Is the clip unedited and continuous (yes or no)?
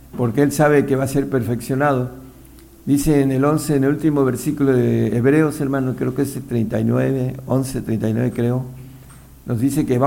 yes